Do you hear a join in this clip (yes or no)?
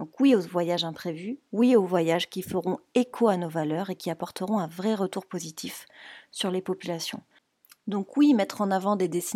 no